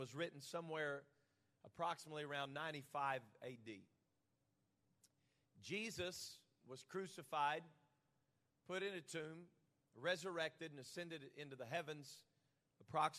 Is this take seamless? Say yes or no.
yes